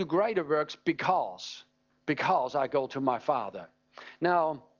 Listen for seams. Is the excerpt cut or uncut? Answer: cut